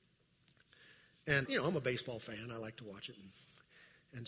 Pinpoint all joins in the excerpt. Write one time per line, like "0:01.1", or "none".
0:01.4